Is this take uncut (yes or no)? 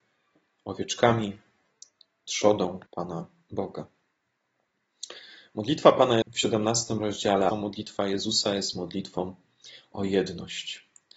no